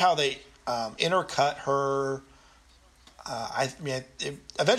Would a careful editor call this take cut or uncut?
uncut